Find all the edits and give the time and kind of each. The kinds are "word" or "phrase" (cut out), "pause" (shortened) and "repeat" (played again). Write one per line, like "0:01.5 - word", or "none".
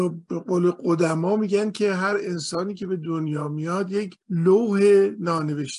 0:04.2 - pause